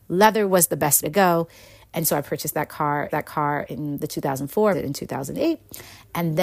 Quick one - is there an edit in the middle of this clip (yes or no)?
yes